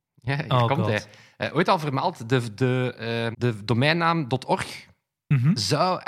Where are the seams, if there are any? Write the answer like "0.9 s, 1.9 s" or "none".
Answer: 3.3 s